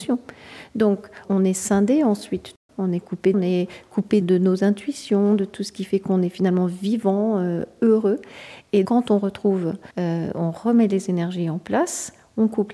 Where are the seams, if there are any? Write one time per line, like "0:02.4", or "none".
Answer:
0:01.2
0:03.3
0:04.2
0:08.8
0:09.9